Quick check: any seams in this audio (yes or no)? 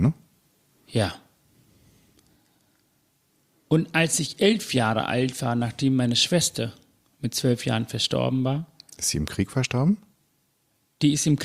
no